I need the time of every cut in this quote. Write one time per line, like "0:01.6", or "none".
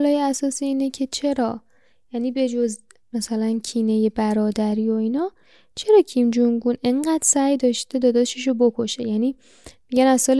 none